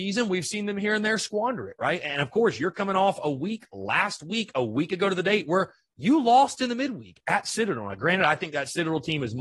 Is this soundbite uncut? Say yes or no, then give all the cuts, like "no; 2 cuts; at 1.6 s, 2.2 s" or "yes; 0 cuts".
yes; 0 cuts